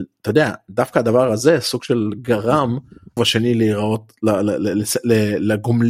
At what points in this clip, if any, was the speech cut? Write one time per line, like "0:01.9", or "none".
0:03.2

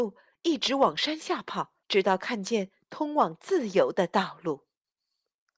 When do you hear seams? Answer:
0:01.8

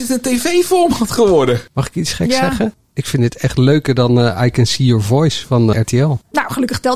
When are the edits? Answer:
0:05.7

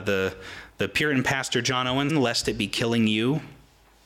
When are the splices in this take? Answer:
0:02.1

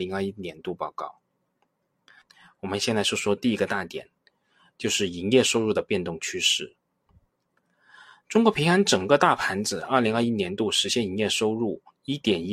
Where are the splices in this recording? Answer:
none

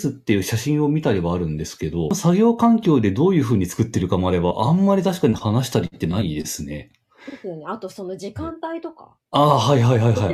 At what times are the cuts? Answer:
0:09.3

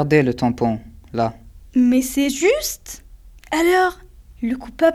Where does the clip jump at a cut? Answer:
none

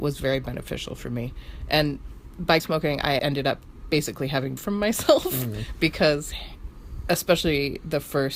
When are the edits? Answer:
0:02.6
0:03.2
0:04.6

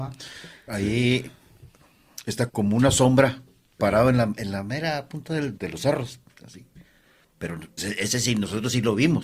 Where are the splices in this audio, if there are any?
0:02.5
0:05.6
0:07.8

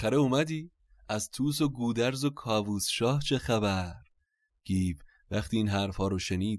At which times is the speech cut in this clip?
none

